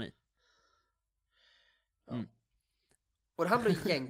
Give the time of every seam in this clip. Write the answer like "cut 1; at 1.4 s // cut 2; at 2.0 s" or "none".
none

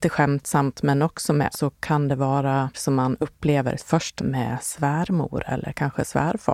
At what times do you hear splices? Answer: cut 1; at 1.5 s // cut 2; at 2.7 s // cut 3; at 3.8 s // cut 4; at 4.2 s

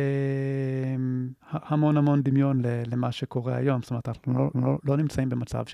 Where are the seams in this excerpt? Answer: cut 1; at 1.4 s // cut 2; at 4.5 s

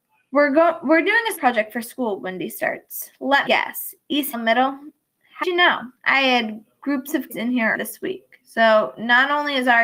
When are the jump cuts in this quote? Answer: cut 1; at 1.4 s // cut 2; at 3.5 s // cut 3; at 4.3 s // cut 4; at 5.4 s // cut 5; at 6.0 s // cut 6; at 7.3 s // cut 7; at 7.7 s // cut 8; at 8.4 s

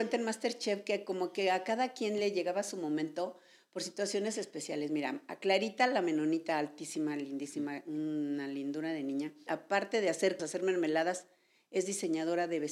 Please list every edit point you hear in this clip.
cut 1; at 9.5 s // cut 2; at 10.4 s

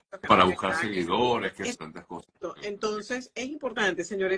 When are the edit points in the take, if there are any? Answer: cut 1; at 1.7 s

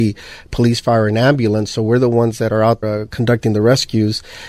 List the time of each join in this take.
cut 1; at 2.8 s

